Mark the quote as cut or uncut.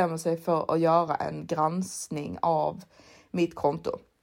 uncut